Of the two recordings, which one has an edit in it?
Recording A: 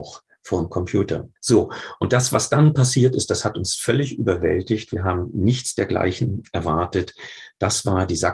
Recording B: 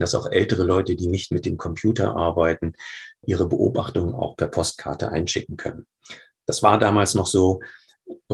A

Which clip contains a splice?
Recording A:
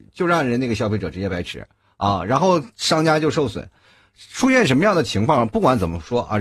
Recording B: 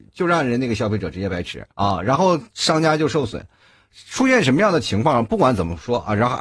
B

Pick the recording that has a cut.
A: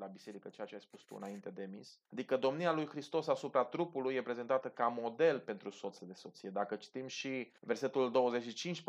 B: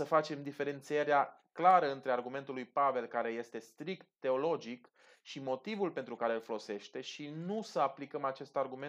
A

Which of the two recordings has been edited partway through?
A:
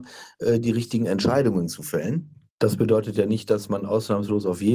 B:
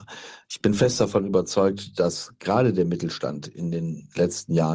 A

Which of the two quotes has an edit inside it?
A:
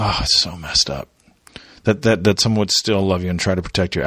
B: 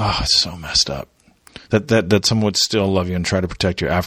B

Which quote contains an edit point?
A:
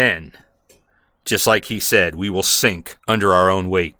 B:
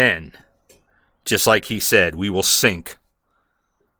A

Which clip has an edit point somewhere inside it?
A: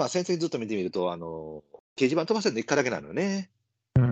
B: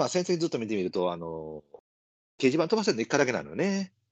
A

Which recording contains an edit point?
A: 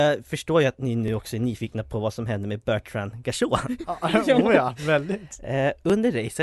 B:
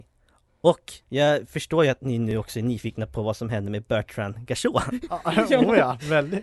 B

